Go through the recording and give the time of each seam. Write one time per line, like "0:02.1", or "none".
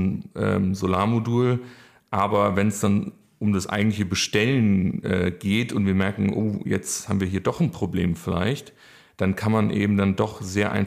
none

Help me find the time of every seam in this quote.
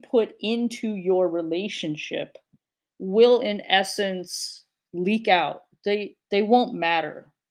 none

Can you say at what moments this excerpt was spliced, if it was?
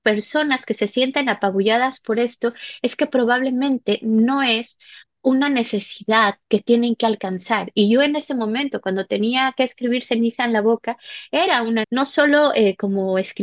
0:11.8

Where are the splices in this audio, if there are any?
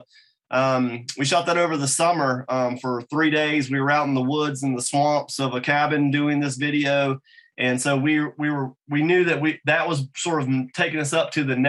none

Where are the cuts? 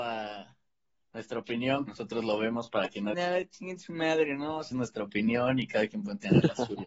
0:01.9
0:03.1
0:04.7

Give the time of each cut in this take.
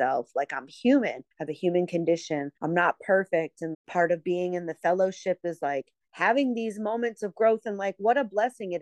0:01.3
0:02.6
0:03.7

